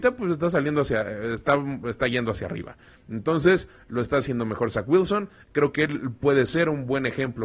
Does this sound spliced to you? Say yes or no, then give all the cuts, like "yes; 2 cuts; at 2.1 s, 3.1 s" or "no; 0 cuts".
no; 0 cuts